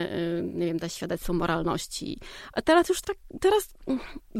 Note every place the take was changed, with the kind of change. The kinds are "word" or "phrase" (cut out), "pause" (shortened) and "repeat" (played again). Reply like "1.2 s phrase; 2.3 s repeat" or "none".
3.0 s word